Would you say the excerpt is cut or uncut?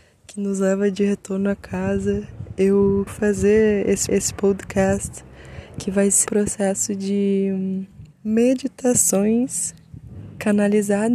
cut